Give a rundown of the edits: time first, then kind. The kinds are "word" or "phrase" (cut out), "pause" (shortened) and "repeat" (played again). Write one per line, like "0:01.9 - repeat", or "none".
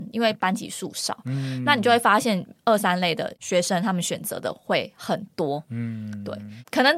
none